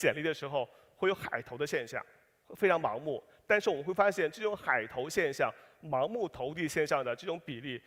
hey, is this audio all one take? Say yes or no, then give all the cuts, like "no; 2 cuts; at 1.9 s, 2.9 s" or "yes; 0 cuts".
yes; 0 cuts